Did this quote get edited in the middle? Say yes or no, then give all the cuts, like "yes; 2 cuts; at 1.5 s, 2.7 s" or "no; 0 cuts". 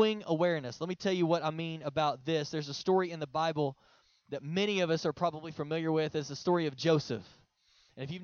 no; 0 cuts